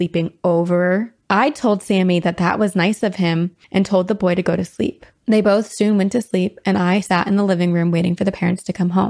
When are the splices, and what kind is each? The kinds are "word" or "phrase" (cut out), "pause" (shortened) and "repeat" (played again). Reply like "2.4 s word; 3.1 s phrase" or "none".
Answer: 3.6 s pause